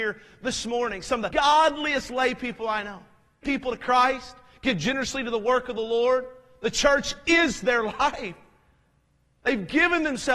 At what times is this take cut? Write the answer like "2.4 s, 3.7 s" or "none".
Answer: 1.3 s, 3.4 s